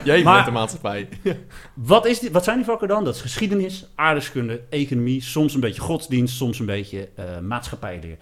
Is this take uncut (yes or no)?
no